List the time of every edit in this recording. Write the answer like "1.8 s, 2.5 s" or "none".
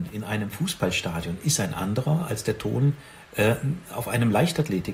none